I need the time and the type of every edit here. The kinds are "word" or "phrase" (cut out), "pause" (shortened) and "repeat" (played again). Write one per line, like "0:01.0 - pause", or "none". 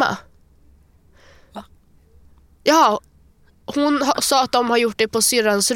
none